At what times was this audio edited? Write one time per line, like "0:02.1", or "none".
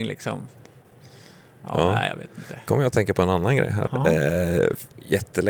0:03.9